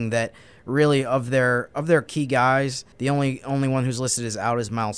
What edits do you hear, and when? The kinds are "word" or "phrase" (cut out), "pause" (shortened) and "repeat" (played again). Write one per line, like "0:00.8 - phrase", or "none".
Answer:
0:02.1 - word
0:02.9 - pause